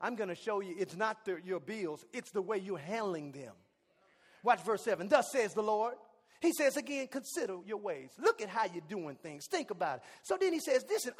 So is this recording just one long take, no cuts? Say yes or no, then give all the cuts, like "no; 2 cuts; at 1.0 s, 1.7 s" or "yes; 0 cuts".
yes; 0 cuts